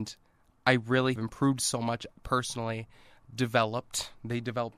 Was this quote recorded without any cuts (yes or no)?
no